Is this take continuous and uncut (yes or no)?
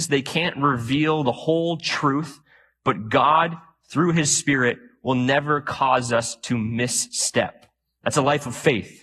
yes